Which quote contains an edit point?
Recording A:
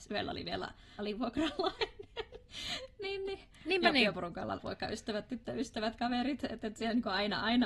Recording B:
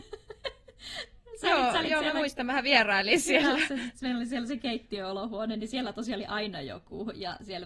A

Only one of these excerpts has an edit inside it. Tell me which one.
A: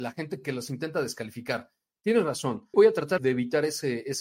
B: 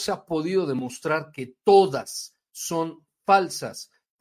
A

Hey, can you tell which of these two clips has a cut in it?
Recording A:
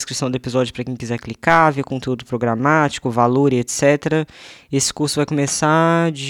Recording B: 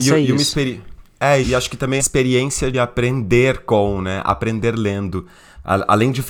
B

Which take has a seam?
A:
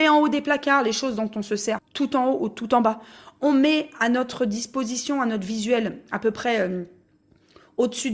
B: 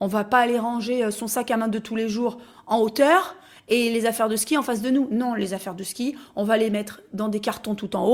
A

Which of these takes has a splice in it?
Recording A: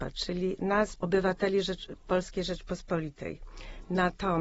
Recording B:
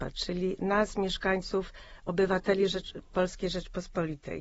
A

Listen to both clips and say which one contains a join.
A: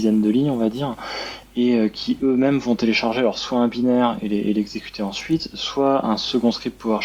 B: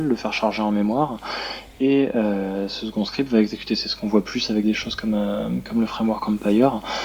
B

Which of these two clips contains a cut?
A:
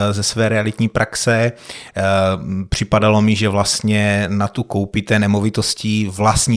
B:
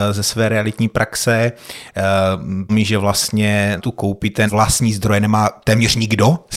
B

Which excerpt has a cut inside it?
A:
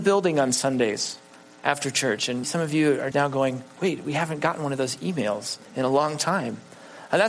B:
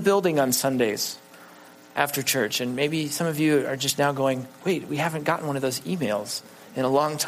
A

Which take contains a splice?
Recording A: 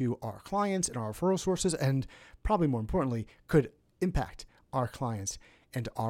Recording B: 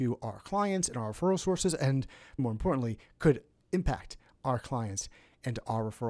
B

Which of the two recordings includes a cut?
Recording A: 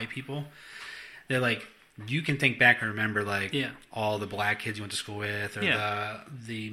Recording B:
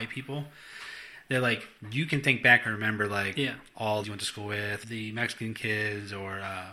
B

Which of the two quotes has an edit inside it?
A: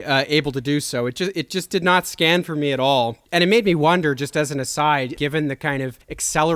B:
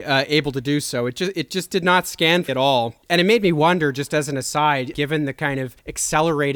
B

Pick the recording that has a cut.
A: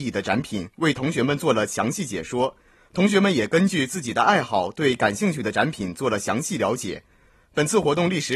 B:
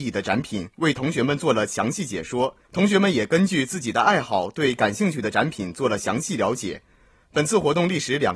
B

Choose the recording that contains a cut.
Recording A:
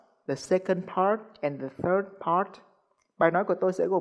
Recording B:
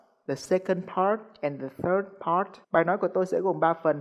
B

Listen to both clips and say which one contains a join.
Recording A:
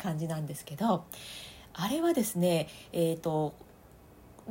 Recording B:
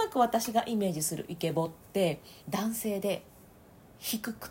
B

